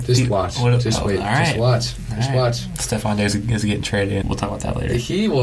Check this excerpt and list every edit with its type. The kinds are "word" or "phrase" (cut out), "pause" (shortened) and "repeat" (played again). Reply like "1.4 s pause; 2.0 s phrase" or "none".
4.2 s phrase